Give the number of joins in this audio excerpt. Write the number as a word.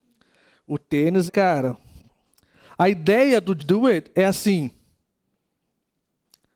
two